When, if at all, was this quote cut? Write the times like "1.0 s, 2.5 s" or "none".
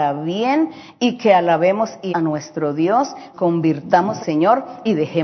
2.1 s, 3.3 s, 4.2 s